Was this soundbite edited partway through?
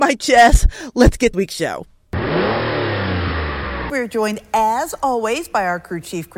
yes; 1 cut; at 1.3 s

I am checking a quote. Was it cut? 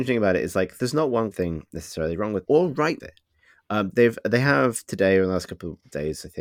yes; 4 cuts; at 1.3 s, 2.5 s, 3.0 s, 3.9 s

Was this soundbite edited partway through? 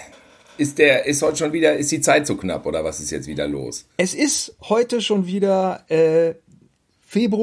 yes; 1 cut; at 3.9 s

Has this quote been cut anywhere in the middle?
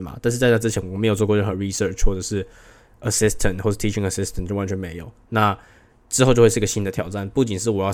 no; 0 cuts

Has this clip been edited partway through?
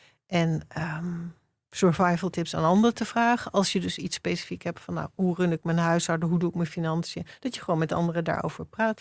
no; 0 cuts

